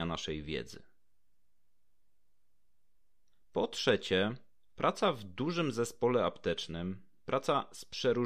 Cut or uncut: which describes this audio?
uncut